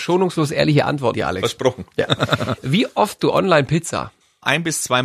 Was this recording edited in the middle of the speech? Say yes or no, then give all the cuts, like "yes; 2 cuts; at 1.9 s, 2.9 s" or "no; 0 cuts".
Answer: yes; 2 cuts; at 1.1 s, 3.2 s